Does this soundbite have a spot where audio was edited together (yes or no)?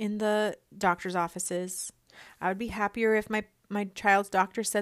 no